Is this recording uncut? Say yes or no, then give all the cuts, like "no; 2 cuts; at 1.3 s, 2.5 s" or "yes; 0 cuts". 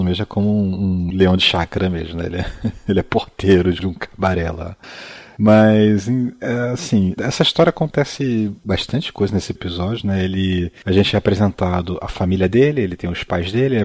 no; 3 cuts; at 3.8 s, 7.2 s, 9.5 s